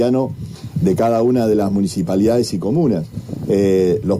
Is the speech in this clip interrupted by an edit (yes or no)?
no